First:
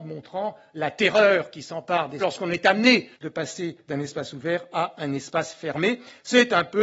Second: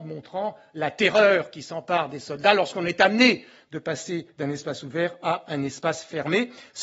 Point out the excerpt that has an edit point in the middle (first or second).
first